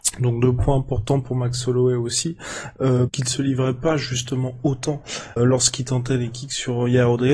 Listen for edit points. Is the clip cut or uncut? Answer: cut